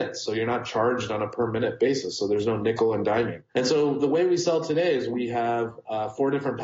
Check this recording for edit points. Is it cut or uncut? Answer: cut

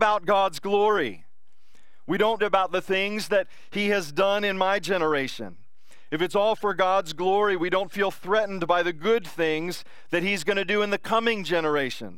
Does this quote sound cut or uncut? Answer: cut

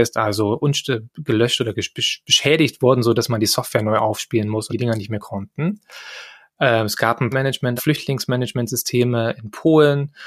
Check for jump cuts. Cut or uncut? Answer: cut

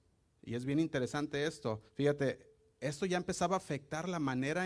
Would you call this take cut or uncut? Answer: cut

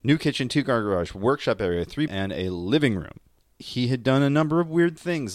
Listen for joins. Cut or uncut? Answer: cut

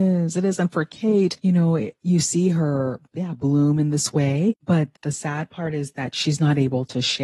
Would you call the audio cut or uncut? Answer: cut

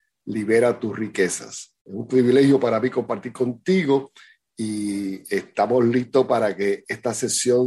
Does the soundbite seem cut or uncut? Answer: uncut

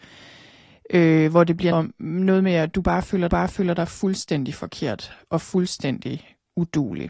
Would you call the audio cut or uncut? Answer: cut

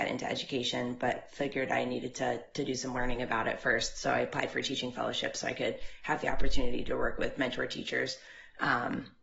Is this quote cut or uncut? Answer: uncut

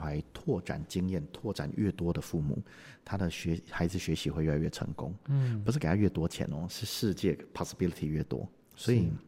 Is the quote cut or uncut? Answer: uncut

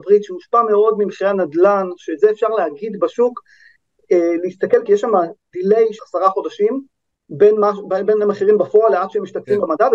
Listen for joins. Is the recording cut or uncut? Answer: cut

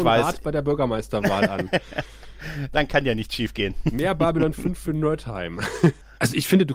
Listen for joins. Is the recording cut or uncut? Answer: uncut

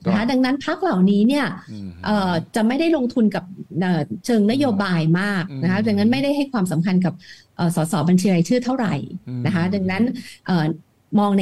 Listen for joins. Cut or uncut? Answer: uncut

